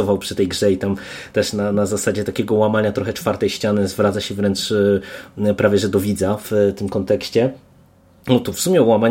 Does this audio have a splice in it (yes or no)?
no